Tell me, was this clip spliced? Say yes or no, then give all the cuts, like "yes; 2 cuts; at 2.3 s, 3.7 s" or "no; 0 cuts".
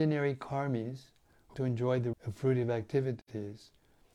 yes; 2 cuts; at 1.5 s, 2.1 s